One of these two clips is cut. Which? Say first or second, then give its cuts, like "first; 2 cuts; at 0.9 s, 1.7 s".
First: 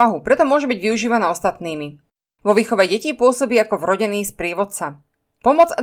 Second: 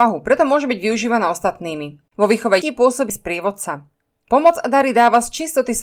second; 3 cuts; at 2.1 s, 2.6 s, 3.1 s